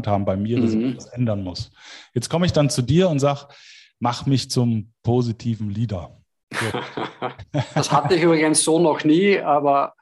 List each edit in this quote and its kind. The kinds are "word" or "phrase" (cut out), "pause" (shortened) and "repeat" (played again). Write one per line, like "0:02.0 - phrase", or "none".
none